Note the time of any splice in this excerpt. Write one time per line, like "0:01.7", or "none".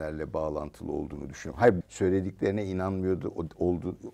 0:01.8